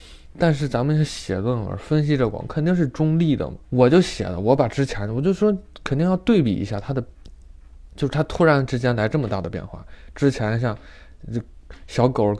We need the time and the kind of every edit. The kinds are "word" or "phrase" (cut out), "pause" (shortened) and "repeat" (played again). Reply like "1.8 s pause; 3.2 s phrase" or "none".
3.6 s pause; 7.9 s pause

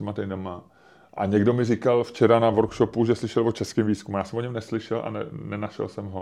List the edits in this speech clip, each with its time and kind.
none

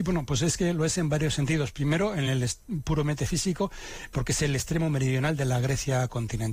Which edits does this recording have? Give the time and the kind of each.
none

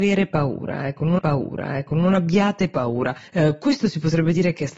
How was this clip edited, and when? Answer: 1.2 s repeat; 3.3 s pause

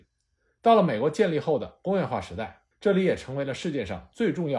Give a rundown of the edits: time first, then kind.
2.7 s pause

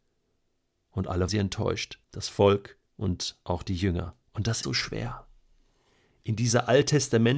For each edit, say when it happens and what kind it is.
1.3 s word; 2.0 s pause; 2.9 s pause; 4.2 s pause; 4.6 s word

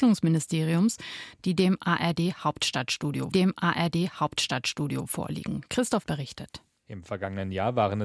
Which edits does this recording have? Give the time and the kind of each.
3.3 s repeat; 6.0 s word

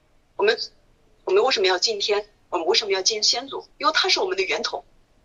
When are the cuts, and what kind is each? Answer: 3.7 s pause

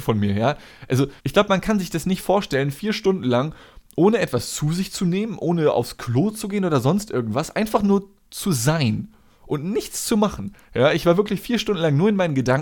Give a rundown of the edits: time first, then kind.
1.2 s pause; 10.6 s pause

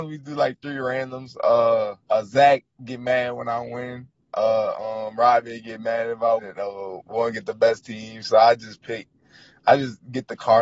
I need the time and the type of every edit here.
2.0 s pause; 6.4 s word

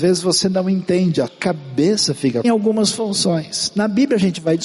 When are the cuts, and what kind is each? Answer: 1.3 s word; 2.4 s phrase

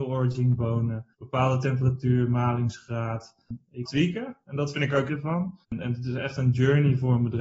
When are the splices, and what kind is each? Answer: 1.1 s pause; 3.8 s phrase; 5.1 s phrase; 5.6 s pause

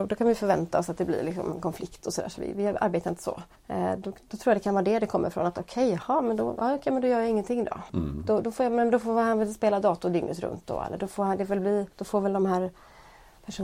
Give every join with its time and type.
3.5 s pause; 7.9 s pause; 11.9 s pause

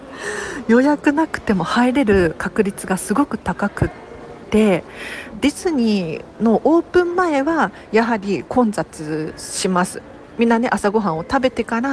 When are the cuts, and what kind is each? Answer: 5.3 s phrase

